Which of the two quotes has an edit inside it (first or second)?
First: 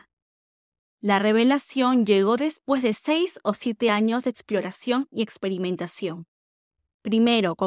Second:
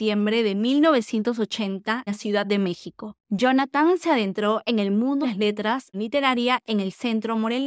second